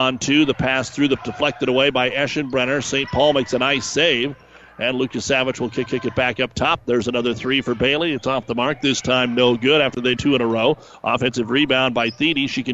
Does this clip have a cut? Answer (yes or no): yes